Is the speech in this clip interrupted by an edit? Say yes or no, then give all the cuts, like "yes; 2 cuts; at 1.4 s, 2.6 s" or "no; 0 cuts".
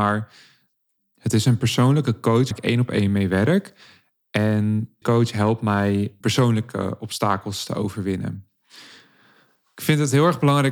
yes; 3 cuts; at 2.5 s, 5.0 s, 6.2 s